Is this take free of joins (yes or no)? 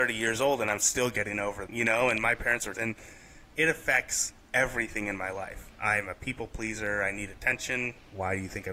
no